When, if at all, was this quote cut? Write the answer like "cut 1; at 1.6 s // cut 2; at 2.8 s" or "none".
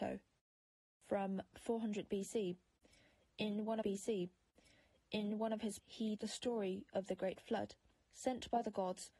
cut 1; at 1.5 s // cut 2; at 3.8 s // cut 3; at 5.8 s // cut 4; at 6.2 s // cut 5; at 7.9 s